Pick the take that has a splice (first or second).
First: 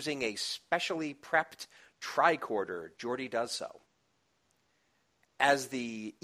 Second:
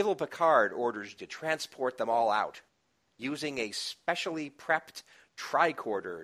second